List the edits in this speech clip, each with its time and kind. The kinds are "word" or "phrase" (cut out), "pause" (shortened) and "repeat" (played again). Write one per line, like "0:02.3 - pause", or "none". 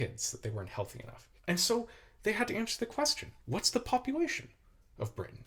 0:01.4 - pause
0:03.4 - pause

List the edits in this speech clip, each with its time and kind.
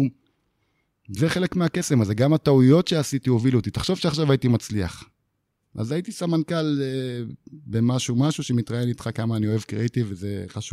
none

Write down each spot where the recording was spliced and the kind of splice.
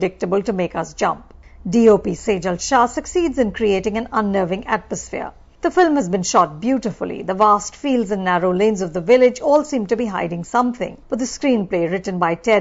none

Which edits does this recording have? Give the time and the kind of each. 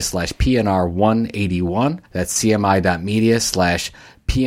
0:02.1 - pause

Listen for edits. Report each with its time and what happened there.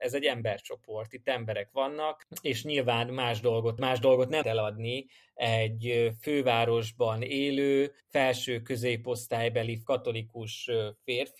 0:03.8 - phrase
0:04.4 - word
0:08.0 - pause
0:09.8 - word

